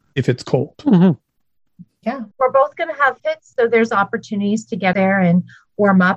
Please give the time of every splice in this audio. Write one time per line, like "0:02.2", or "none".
0:02.3
0:03.2
0:03.9
0:04.9